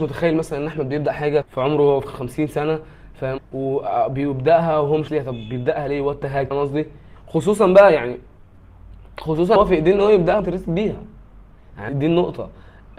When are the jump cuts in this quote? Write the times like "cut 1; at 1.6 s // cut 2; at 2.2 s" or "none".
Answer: cut 1; at 1.4 s // cut 2; at 2.1 s // cut 3; at 3.4 s // cut 4; at 5.1 s // cut 5; at 6.5 s // cut 6; at 9.6 s // cut 7; at 10.4 s // cut 8; at 11.9 s